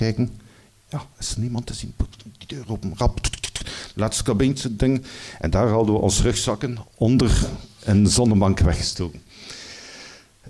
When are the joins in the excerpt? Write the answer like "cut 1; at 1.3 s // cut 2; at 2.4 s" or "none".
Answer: cut 1; at 6.9 s